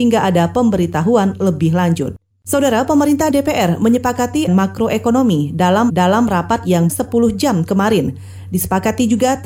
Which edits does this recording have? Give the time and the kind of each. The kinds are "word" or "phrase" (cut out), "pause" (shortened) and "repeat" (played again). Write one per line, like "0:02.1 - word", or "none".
0:02.3 - pause
0:03.3 - word
0:04.5 - phrase
0:05.9 - repeat
0:06.9 - phrase